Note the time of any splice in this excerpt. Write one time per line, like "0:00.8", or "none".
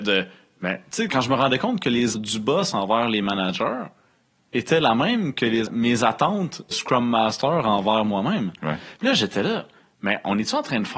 0:01.1
0:02.1
0:05.7
0:06.7